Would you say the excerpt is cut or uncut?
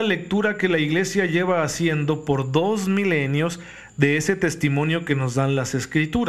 uncut